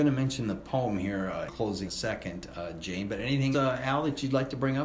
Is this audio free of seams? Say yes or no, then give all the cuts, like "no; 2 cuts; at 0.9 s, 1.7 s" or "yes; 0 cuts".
no; 3 cuts; at 1.5 s, 1.8 s, 3.5 s